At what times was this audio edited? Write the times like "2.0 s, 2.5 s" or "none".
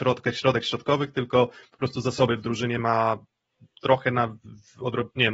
none